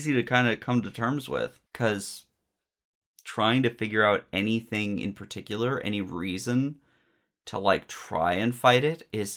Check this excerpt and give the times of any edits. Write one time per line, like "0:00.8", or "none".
0:01.7

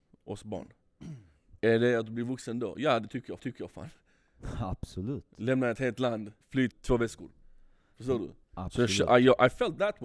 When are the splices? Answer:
0:01.6
0:03.4
0:06.4
0:06.7
0:08.4

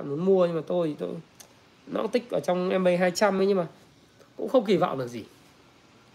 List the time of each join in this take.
none

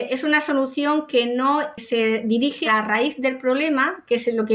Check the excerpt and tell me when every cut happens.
0:02.6

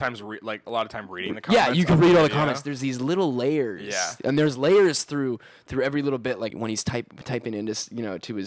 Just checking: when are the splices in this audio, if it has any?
0:06.5

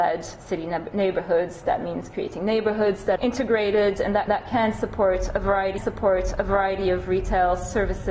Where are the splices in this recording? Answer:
0:03.2
0:04.3
0:05.8

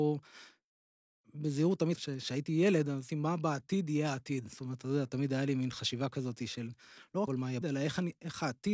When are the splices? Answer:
0:02.0
0:03.1
0:07.3
0:07.6

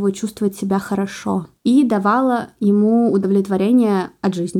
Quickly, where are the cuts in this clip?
0:01.6

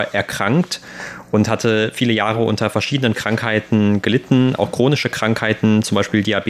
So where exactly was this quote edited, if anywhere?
none

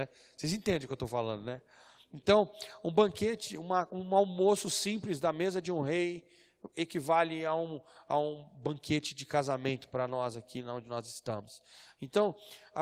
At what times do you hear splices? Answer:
none

